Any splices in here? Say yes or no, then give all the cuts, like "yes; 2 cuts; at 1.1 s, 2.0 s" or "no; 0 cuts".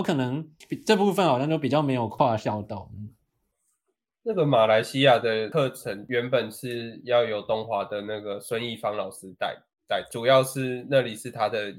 no; 0 cuts